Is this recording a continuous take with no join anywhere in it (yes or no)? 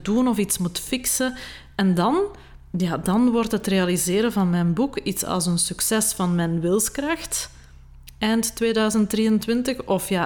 yes